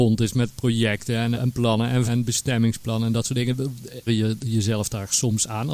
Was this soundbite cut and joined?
yes; 3 cuts; at 1.4 s, 2.1 s, 4.1 s

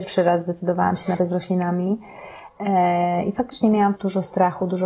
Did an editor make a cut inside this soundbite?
yes; 2 cuts; at 1.2 s, 4.0 s

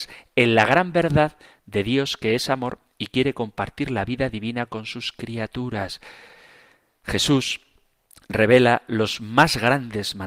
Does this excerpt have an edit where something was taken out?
no; 0 cuts

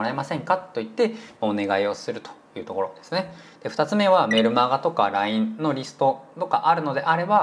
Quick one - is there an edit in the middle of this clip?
no; 0 cuts

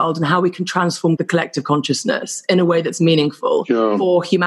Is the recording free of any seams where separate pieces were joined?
yes; 0 cuts

